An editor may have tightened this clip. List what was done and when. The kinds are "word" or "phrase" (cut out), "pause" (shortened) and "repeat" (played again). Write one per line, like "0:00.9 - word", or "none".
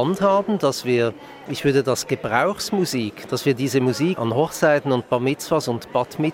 0:01.5 - word
0:03.3 - word
0:04.2 - word